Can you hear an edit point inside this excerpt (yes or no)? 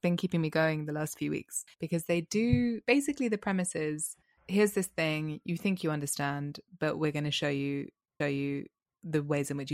yes